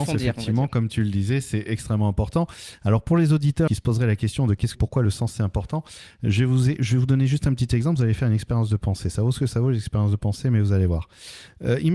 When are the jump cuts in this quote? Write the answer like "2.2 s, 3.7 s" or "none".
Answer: 3.7 s, 4.7 s